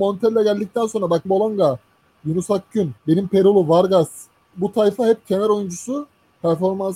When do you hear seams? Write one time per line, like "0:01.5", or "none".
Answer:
0:01.2
0:03.0
0:04.5